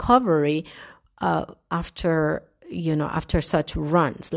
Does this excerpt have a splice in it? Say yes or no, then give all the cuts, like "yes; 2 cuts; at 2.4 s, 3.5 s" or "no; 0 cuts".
no; 0 cuts